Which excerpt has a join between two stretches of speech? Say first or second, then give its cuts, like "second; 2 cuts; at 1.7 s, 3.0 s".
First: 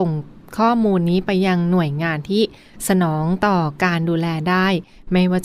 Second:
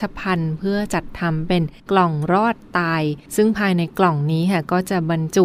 second; 2 cuts; at 1.8 s, 3.3 s